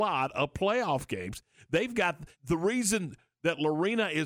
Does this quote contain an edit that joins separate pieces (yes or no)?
yes